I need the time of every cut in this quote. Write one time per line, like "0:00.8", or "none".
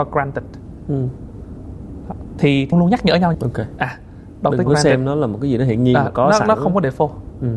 0:02.7
0:03.3
0:04.7